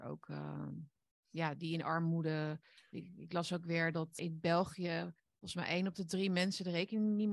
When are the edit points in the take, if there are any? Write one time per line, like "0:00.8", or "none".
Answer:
0:04.2
0:05.2